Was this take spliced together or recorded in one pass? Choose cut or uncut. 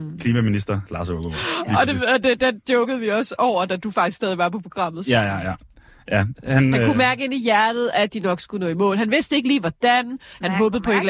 uncut